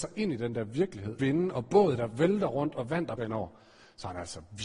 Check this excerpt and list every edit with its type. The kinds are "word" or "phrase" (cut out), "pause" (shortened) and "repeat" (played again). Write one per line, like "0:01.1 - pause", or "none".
0:01.2 - phrase
0:03.2 - word